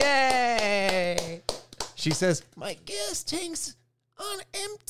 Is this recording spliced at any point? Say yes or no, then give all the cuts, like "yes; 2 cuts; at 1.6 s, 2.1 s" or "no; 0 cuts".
no; 0 cuts